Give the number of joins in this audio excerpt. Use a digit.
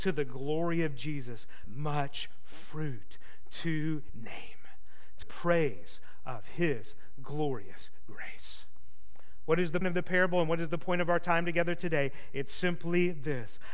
4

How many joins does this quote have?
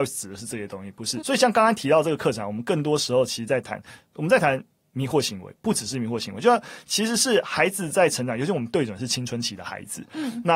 1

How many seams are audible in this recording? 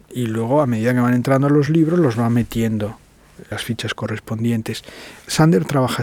0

